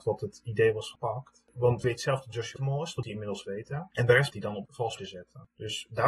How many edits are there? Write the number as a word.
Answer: seven